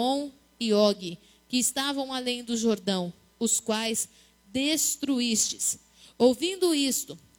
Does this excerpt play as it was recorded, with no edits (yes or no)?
yes